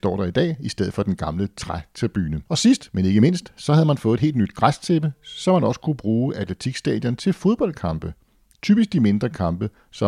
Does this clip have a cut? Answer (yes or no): yes